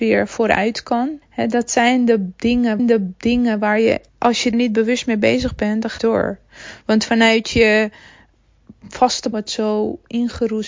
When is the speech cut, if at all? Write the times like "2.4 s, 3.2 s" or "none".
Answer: 1.2 s, 2.8 s, 4.1 s, 4.5 s, 6.0 s, 9.3 s